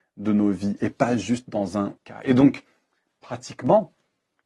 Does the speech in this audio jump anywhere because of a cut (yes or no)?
yes